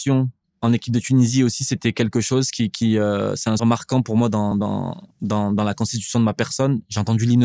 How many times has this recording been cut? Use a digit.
3